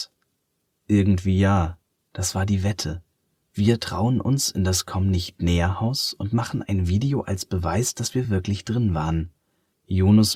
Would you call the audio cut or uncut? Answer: uncut